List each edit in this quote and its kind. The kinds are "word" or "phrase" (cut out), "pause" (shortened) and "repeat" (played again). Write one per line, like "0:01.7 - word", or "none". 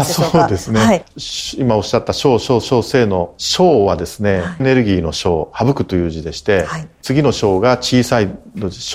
0:02.6 - repeat
0:04.6 - phrase